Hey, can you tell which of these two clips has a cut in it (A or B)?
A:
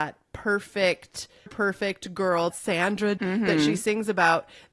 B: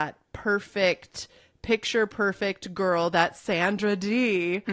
A